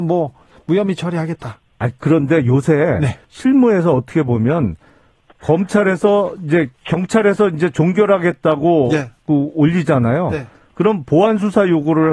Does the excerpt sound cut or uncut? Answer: cut